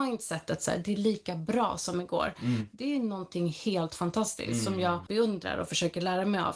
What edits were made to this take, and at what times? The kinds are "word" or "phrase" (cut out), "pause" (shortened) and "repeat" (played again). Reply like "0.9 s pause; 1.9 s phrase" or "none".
5.1 s word